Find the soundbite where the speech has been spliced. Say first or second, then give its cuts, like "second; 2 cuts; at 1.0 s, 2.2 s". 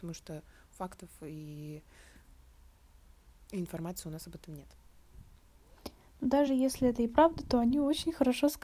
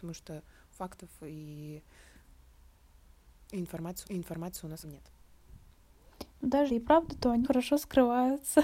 second; 5 cuts; at 4.0 s, 4.8 s, 6.3 s, 6.7 s, 7.4 s